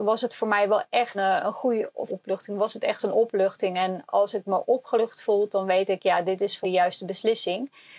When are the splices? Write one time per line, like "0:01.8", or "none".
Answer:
0:01.1
0:02.1
0:06.6

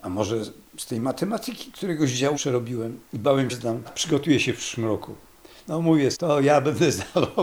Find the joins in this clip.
0:02.3
0:03.1
0:03.5
0:03.8
0:06.1

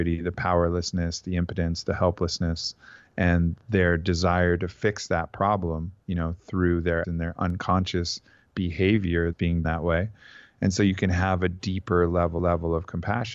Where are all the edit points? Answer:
0:06.0
0:07.0
0:09.3
0:09.6
0:12.4

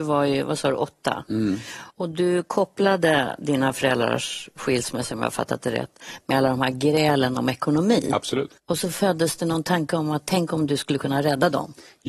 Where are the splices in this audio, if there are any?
0:01.9
0:08.6

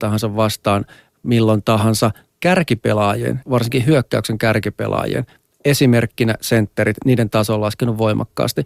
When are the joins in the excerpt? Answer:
0:03.4

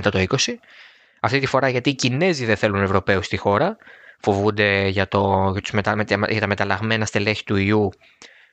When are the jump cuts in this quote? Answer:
none

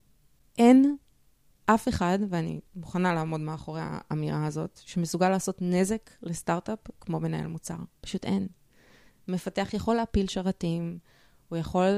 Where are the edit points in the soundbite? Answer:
0:02.7

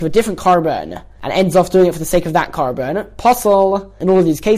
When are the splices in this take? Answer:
none

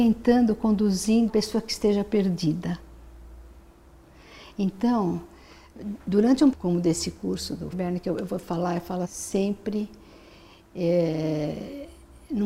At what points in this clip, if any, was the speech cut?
0:01.3
0:06.5
0:07.7
0:09.0

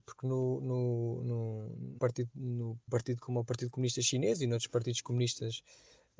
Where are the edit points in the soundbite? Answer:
0:02.0
0:02.9

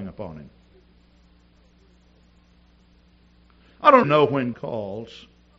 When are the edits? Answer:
0:04.0
0:04.5

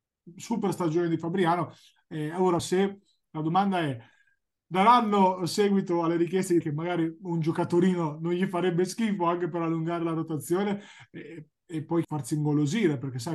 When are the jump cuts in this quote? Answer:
0:02.6
0:06.6
0:12.0

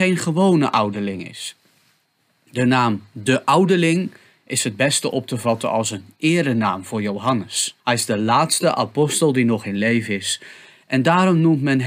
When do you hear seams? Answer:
0:07.8

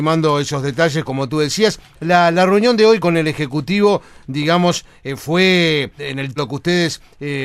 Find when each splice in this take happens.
0:01.0
0:03.0
0:06.0
0:06.4

